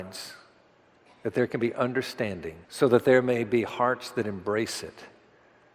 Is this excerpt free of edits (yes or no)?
no